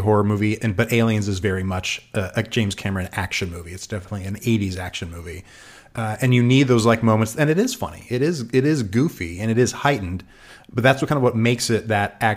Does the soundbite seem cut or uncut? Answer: uncut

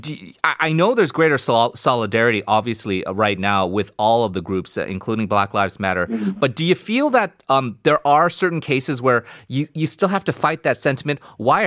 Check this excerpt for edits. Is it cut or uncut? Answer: uncut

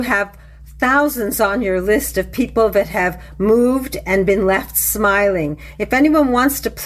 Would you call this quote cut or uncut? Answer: uncut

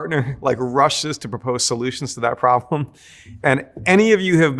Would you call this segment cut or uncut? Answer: uncut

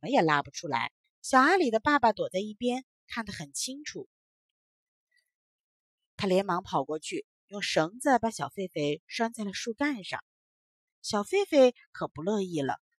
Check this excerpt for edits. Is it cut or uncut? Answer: cut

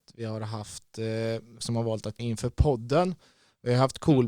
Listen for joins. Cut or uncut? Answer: cut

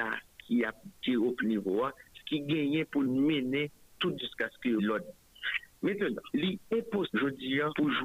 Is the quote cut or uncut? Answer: cut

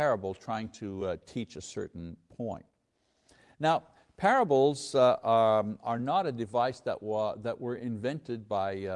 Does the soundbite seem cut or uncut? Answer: uncut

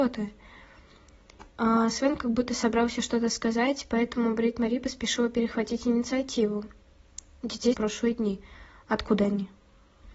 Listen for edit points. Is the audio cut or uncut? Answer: cut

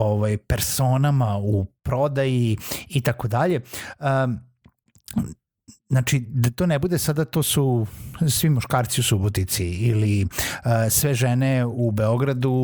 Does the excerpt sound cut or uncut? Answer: uncut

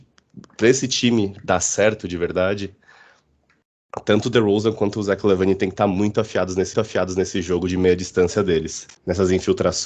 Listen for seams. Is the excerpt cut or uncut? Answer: cut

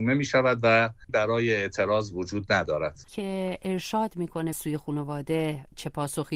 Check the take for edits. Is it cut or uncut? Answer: cut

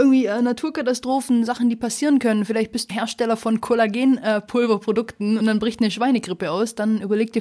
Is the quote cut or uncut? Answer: cut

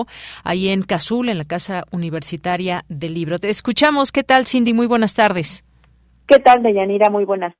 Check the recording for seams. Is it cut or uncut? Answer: uncut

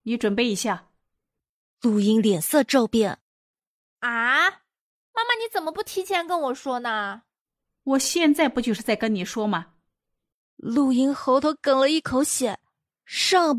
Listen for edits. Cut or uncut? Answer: uncut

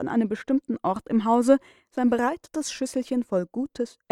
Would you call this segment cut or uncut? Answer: uncut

